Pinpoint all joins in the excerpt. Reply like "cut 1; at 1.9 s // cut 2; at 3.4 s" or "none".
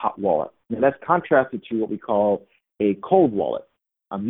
none